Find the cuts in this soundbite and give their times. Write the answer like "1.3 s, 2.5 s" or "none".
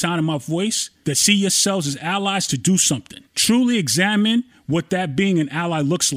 3.3 s

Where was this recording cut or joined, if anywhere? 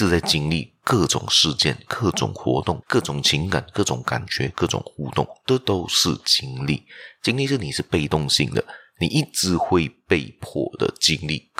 2.8 s

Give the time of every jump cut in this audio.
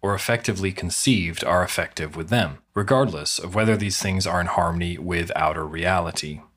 2.7 s

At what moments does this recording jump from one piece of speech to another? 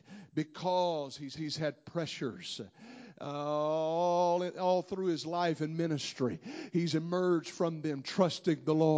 1.4 s

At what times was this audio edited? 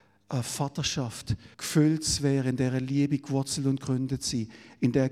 1.5 s

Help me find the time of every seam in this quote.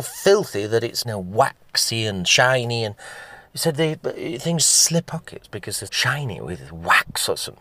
1.0 s, 4.6 s, 5.1 s, 5.9 s

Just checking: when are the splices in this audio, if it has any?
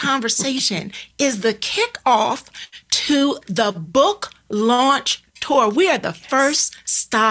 none

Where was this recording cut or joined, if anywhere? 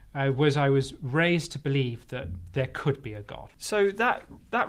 none

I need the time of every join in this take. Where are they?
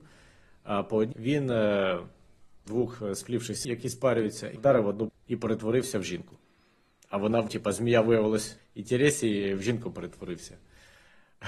1.1 s, 2.7 s, 3.6 s, 4.6 s, 5.1 s, 7.5 s, 8.6 s

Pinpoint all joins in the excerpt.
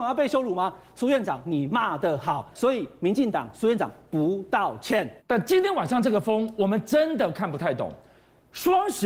2.5 s, 5.2 s

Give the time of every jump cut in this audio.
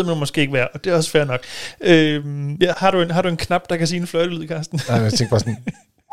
2.7 s

